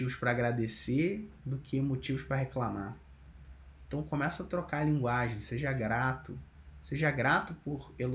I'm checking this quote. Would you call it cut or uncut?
uncut